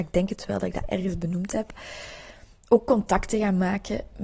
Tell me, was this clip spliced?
no; 0 cuts

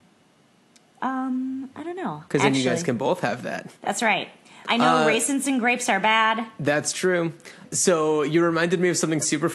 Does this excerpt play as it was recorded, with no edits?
no; 4 cuts; at 2.3 s, 3.8 s, 4.7 s, 7.6 s

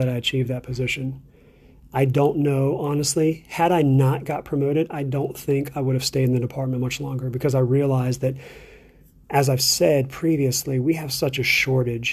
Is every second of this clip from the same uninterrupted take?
yes; 0 cuts

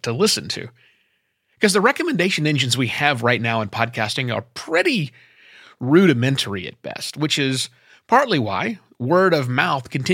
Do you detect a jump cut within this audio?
no; 0 cuts

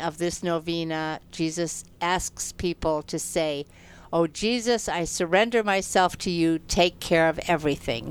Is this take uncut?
yes; 0 cuts

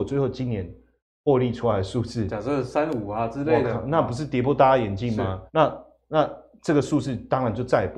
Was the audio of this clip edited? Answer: yes; 1 cut; at 5.5 s

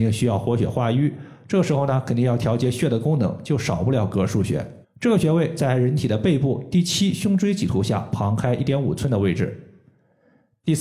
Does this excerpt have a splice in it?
yes; 1 cut; at 4.8 s

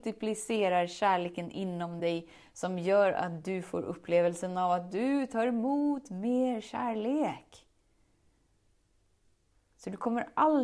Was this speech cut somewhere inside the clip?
no; 0 cuts

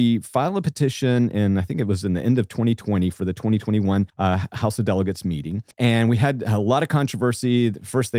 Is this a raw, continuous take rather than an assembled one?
no; 2 cuts; at 4.1 s, 5.7 s

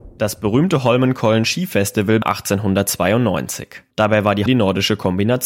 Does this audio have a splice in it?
yes; 3 cuts; at 2.2 s, 3.9 s, 4.5 s

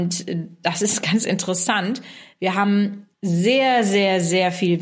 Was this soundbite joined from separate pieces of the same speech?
yes; 1 cut; at 3.1 s

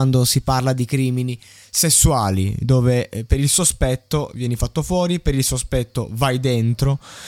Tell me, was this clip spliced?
no; 0 cuts

